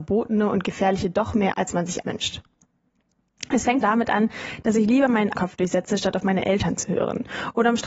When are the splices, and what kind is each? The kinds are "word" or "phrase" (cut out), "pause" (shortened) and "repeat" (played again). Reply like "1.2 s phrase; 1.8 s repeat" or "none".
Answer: 1.5 s word; 2.0 s word; 3.8 s word; 5.3 s word

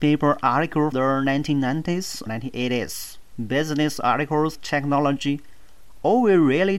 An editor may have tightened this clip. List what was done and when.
0.9 s word; 2.3 s word; 4.5 s word

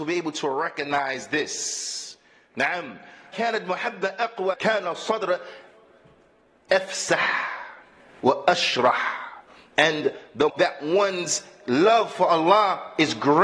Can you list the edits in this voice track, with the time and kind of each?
3.3 s word; 4.5 s word; 10.5 s word

